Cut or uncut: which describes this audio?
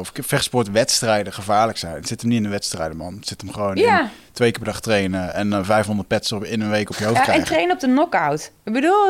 uncut